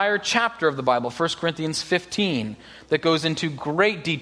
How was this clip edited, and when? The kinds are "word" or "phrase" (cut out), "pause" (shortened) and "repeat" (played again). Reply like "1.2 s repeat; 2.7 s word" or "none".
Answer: none